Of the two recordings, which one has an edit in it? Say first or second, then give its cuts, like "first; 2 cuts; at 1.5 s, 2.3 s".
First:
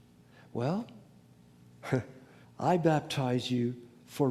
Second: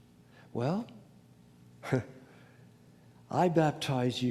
first; 1 cut; at 2.4 s